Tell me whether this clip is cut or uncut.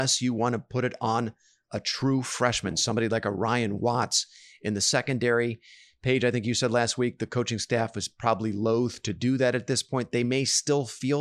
uncut